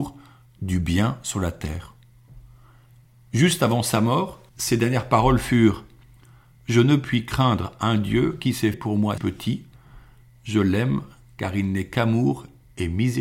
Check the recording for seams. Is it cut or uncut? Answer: cut